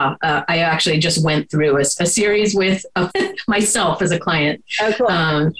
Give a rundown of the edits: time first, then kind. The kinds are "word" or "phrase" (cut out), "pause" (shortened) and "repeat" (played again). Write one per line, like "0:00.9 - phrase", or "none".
0:03.1 - phrase